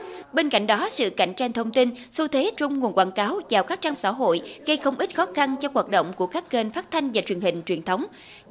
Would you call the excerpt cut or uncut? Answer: cut